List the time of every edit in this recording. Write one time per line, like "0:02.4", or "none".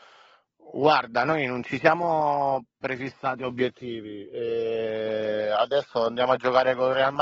0:02.7